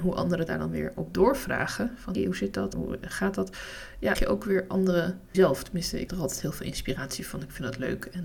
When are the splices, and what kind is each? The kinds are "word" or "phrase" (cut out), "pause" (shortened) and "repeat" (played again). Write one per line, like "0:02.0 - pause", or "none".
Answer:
0:02.1 - word
0:02.7 - word
0:04.1 - word
0:05.3 - word
0:06.1 - word

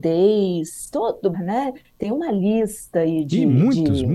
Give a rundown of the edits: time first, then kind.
0:01.3 - phrase

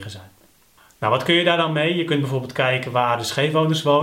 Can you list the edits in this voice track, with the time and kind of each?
none

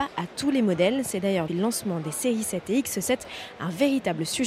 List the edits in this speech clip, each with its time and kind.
0:01.5 - word

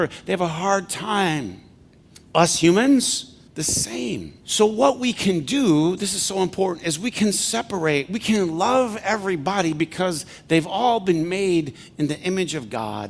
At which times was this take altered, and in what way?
0:01.8 - pause
0:03.5 - pause
0:04.4 - pause

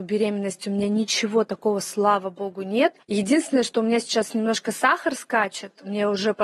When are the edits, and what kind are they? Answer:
0:03.0 - pause

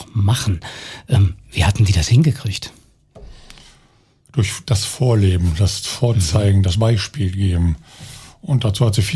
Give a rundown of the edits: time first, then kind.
none

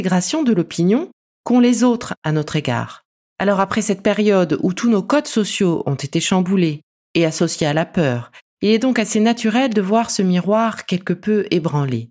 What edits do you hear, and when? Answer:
none

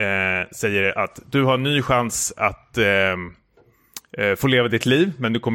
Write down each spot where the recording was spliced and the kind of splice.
none

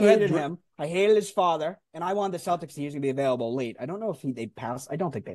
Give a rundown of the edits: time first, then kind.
0:01.8 - pause
0:02.8 - phrase

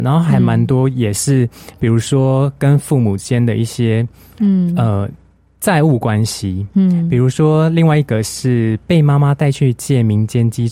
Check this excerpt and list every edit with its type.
none

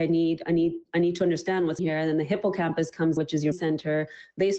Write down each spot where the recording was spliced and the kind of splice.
0:01.8 - word
0:03.2 - word
0:03.5 - word

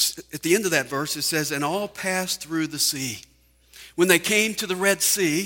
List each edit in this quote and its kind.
none

